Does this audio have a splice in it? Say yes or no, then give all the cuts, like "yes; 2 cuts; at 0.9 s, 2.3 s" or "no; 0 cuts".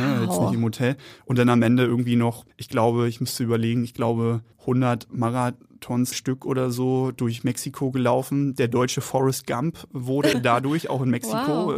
yes; 4 cuts; at 2.5 s, 4.5 s, 6.1 s, 10.3 s